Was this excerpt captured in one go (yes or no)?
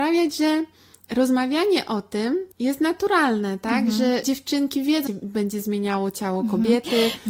no